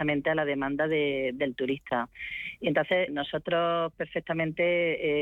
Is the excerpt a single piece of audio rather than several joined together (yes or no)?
no